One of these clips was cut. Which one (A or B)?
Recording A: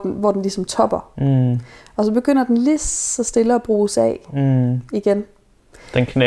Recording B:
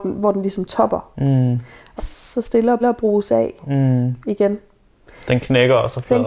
B